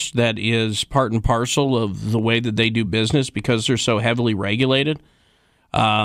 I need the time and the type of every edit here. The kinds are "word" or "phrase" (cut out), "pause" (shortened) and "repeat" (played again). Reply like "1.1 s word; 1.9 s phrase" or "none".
none